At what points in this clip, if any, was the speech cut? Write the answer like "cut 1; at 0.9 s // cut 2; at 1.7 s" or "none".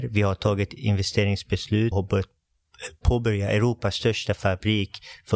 cut 1; at 1.9 s